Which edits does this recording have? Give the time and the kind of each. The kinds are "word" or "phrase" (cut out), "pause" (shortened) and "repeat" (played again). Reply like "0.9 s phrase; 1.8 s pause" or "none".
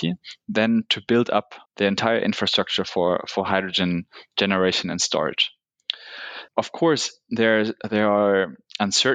1.7 s pause; 6.5 s pause